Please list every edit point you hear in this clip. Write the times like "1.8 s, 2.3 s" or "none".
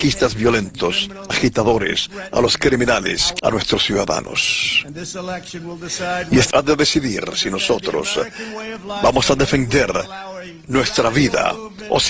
1.3 s, 3.4 s, 6.5 s